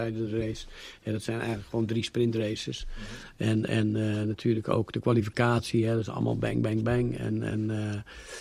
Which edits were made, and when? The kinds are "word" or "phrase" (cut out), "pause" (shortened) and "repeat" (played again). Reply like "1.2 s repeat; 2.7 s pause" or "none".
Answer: none